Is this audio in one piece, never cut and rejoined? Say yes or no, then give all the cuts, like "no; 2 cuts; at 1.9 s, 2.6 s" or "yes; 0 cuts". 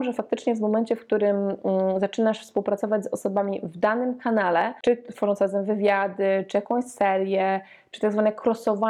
yes; 0 cuts